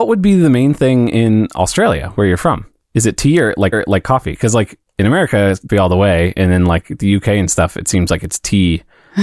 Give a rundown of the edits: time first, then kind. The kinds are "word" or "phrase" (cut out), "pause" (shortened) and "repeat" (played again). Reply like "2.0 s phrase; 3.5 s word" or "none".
3.7 s repeat; 5.7 s word